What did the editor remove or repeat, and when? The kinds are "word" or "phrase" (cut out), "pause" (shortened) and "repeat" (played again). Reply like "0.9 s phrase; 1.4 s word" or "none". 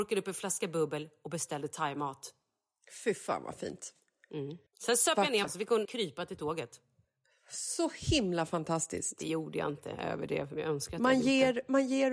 4.7 s pause; 5.4 s word; 5.8 s word